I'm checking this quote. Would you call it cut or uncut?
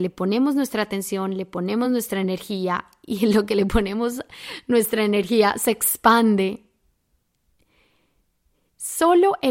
uncut